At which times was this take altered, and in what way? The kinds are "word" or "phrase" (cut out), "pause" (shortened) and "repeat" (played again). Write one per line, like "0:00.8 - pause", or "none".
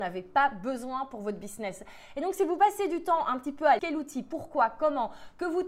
0:03.8 - phrase